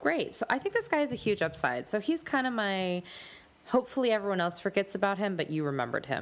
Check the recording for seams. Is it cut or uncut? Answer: uncut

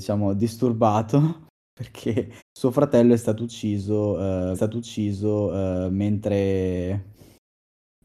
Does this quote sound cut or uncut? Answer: cut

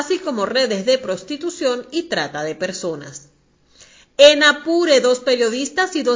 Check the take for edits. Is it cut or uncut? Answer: uncut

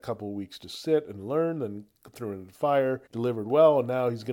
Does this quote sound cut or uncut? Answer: cut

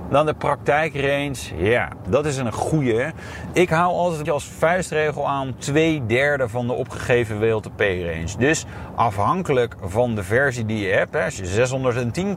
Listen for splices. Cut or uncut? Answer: cut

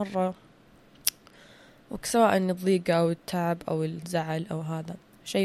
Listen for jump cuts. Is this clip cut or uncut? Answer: uncut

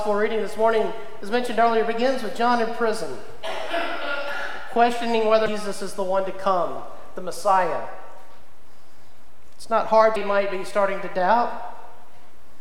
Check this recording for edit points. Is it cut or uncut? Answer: cut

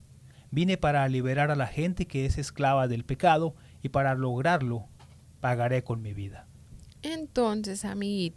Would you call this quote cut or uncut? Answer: uncut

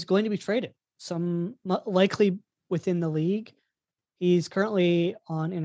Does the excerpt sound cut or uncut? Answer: uncut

